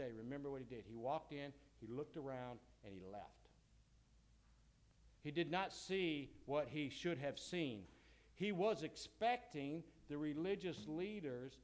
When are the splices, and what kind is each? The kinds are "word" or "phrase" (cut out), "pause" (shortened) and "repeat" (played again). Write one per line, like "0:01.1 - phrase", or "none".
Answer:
0:05.2 - pause